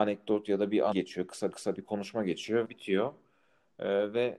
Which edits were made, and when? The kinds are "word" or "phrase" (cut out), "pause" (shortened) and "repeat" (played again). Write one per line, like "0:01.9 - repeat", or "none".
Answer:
0:00.9 - word
0:01.5 - repeat
0:02.6 - phrase